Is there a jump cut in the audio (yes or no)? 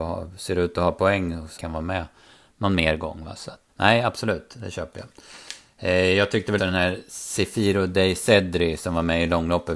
yes